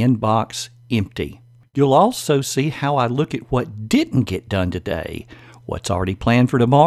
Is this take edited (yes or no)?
no